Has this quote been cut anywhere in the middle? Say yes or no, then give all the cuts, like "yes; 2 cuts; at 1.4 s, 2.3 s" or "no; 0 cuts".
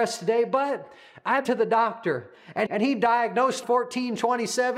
yes; 3 cuts; at 1.4 s, 2.7 s, 3.6 s